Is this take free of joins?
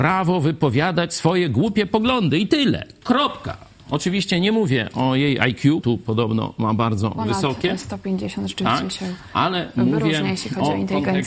no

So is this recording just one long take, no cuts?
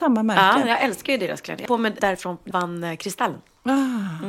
no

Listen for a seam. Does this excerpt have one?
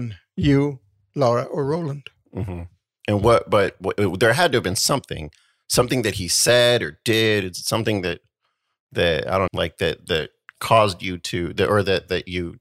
yes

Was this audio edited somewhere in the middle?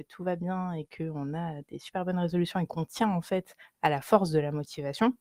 no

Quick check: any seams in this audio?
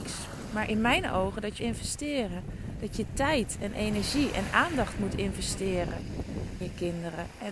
yes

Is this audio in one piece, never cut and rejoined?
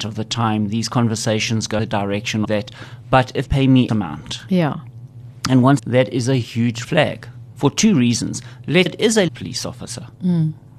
no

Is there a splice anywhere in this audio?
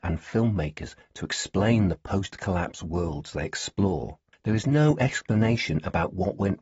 yes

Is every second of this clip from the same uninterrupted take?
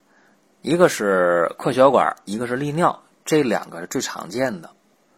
yes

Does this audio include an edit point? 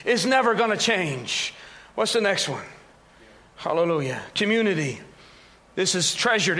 no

